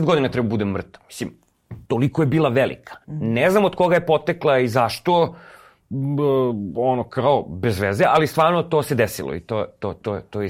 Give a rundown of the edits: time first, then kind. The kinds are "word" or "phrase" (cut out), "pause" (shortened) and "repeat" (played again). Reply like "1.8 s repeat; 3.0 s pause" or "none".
1.8 s pause; 3.0 s pause